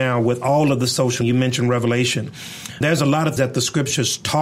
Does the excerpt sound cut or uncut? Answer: cut